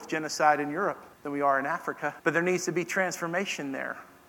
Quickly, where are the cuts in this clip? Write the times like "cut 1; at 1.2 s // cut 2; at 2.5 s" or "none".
cut 1; at 1.1 s // cut 2; at 2.2 s